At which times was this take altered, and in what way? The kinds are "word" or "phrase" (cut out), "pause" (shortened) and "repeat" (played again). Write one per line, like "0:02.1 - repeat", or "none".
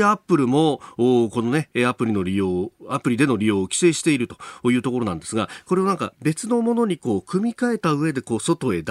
none